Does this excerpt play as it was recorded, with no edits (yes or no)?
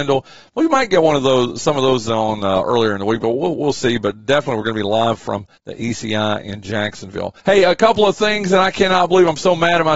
no